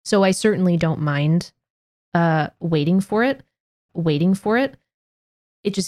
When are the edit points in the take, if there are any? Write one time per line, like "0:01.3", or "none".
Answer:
0:03.9